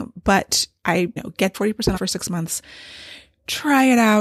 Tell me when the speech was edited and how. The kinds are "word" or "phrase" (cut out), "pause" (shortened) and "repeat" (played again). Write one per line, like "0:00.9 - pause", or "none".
0:01.2 - word
0:01.5 - word
0:02.0 - word